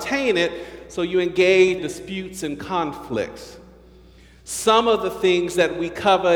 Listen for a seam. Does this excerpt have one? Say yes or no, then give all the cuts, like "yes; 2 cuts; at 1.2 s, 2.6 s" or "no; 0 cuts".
yes; 1 cut; at 1.8 s